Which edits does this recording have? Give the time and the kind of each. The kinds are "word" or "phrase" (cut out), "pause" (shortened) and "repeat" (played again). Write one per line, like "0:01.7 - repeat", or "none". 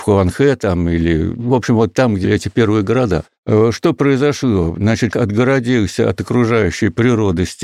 0:01.4 - word
0:02.2 - word
0:05.1 - word